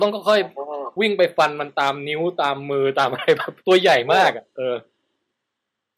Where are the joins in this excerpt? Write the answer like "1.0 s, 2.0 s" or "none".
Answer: 3.6 s